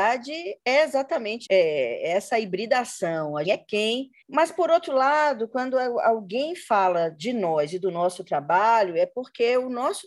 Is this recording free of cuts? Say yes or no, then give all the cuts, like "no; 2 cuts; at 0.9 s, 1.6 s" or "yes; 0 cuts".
no; 3 cuts; at 1.5 s, 3.4 s, 4.2 s